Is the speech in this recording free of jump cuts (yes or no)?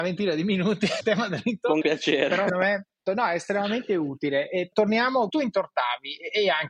no